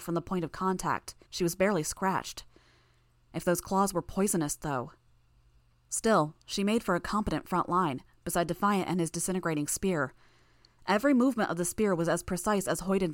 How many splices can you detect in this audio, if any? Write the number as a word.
one